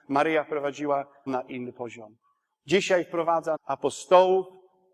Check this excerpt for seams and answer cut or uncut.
cut